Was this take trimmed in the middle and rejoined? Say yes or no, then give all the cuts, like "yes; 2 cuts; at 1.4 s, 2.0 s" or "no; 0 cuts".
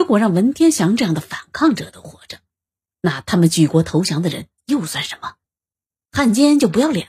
no; 0 cuts